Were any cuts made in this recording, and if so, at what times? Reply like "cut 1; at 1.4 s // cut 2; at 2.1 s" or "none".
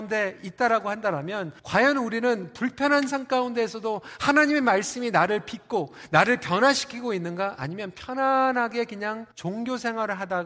cut 1; at 1.6 s // cut 2; at 9.3 s